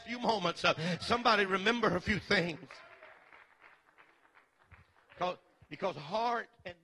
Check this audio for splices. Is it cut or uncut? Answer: uncut